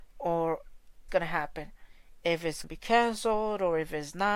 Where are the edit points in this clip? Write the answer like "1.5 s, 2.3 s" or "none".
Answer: 1.1 s, 2.6 s